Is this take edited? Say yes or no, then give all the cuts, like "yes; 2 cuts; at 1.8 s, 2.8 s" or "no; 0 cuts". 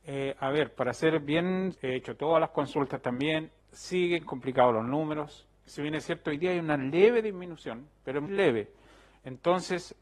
yes; 4 cuts; at 1.7 s, 3.6 s, 5.6 s, 8.3 s